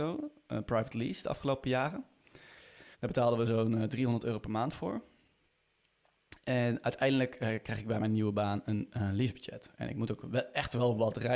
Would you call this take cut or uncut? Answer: cut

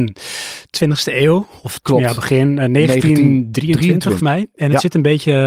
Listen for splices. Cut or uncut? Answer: cut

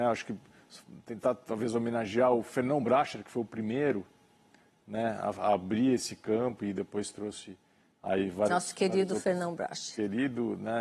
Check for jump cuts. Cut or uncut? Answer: uncut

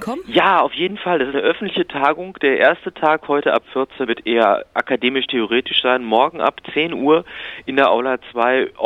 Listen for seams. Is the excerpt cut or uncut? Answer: cut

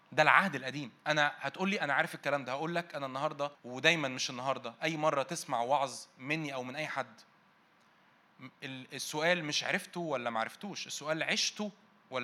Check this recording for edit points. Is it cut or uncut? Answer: cut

